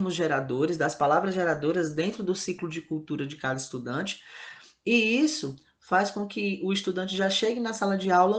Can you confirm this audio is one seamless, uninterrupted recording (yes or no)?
yes